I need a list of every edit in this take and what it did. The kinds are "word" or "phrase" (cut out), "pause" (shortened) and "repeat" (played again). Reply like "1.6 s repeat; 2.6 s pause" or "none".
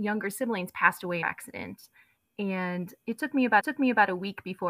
1.2 s phrase; 3.6 s repeat